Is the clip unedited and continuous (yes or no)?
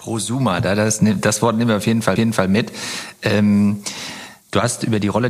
no